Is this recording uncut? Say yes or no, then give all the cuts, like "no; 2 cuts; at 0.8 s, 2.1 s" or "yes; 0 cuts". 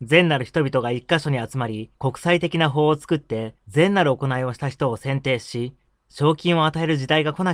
no; 2 cuts; at 1.9 s, 3.6 s